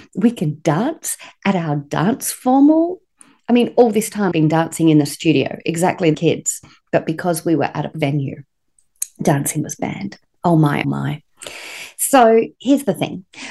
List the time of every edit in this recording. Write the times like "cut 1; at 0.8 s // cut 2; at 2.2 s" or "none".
cut 1; at 4.3 s // cut 2; at 6.1 s // cut 3; at 7.9 s // cut 4; at 10.8 s

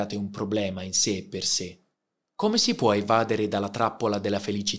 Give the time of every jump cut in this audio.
none

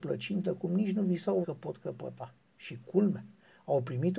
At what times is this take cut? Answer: cut 1; at 1.4 s

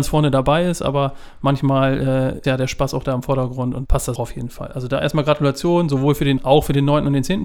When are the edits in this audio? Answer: cut 1; at 2.4 s // cut 2; at 3.8 s // cut 3; at 4.2 s // cut 4; at 6.4 s

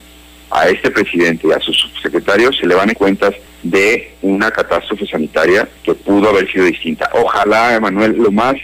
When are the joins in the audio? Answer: cut 1; at 2.9 s // cut 2; at 3.5 s // cut 3; at 5.8 s

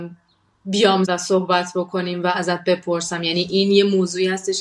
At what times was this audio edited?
cut 1; at 1.0 s

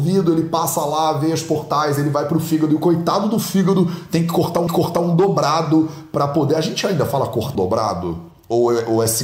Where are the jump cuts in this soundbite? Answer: cut 1; at 4.7 s // cut 2; at 7.6 s

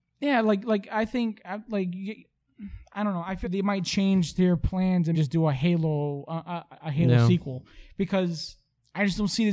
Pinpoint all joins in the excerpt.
cut 1; at 3.4 s // cut 2; at 5.1 s

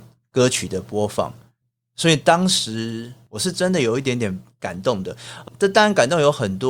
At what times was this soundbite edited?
none

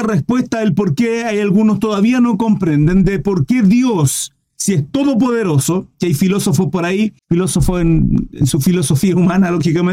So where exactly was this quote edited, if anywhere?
cut 1; at 7.2 s

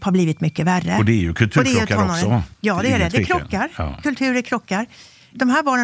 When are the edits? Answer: none

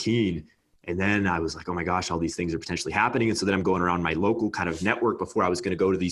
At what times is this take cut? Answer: none

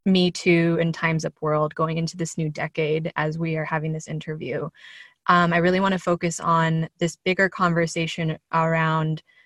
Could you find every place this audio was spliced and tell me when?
none

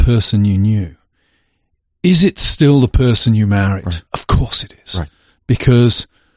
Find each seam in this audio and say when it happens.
cut 1; at 4.1 s

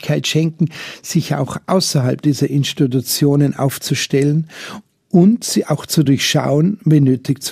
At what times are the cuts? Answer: none

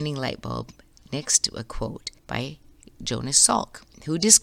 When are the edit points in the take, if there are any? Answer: cut 1; at 2.2 s

